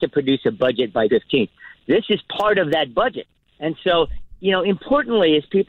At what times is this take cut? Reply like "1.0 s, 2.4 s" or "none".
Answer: 1.1 s